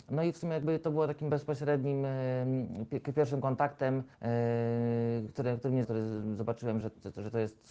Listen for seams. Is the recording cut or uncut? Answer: cut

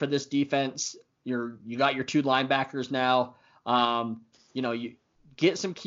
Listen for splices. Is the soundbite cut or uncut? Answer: uncut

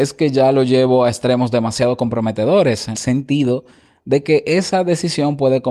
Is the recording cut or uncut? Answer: cut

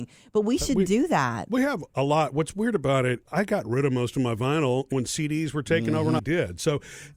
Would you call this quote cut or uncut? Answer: cut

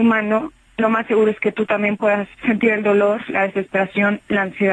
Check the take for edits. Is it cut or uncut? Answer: cut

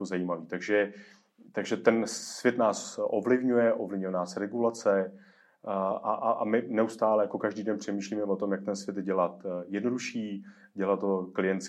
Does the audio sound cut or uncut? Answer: uncut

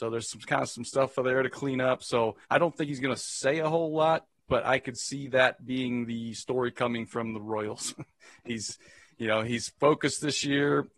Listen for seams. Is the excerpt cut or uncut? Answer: cut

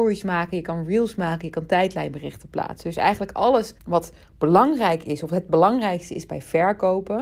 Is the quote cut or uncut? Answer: cut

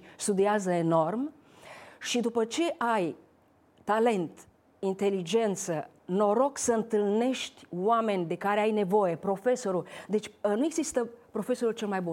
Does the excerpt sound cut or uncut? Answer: uncut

